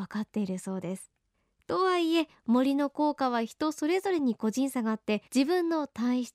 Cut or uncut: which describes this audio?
cut